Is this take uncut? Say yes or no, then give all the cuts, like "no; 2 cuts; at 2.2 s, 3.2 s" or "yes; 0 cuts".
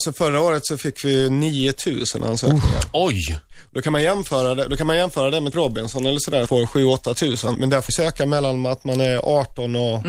no; 4 cuts; at 5.5 s, 6.5 s, 7.5 s, 7.9 s